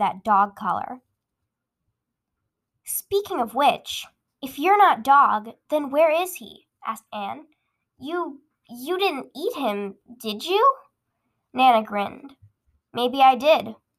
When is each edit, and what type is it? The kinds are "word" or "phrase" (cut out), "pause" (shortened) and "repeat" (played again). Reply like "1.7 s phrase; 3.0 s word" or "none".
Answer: none